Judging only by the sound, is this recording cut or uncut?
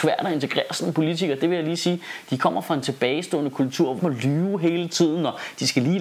cut